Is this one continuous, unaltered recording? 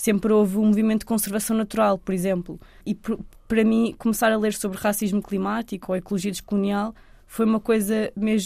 yes; 0 cuts

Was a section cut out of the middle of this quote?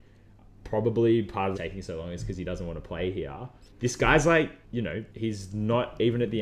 yes; 4 cuts; at 1.5 s, 3.7 s, 4.6 s, 5.1 s

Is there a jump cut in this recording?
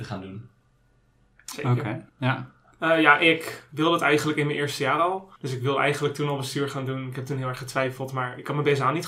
yes; 2 cuts; at 2.1 s, 5.4 s

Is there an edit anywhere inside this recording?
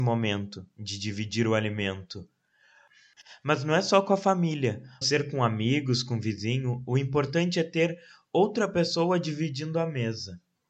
yes; 1 cut; at 5.0 s

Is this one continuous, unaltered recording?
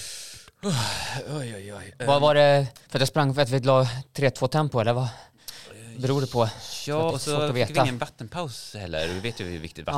no; 2 cuts; at 2.8 s, 7.1 s

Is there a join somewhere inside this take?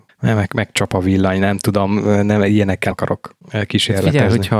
yes; 1 cut; at 2.9 s

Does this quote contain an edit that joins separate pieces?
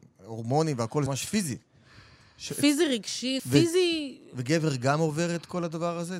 yes; 2 cuts; at 1.1 s, 3.4 s

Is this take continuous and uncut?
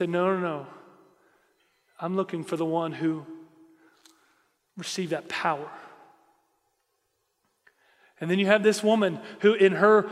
yes; 0 cuts

